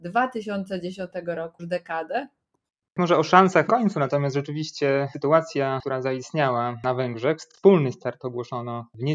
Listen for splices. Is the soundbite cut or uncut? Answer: cut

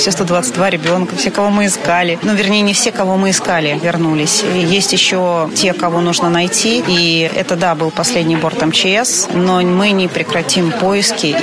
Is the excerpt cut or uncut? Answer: uncut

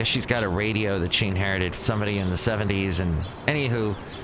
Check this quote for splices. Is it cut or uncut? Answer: cut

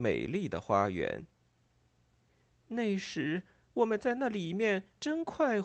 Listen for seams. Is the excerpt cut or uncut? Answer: uncut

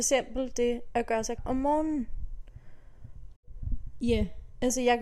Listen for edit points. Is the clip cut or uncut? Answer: cut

